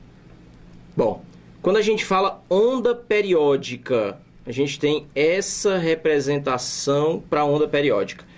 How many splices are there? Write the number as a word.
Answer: zero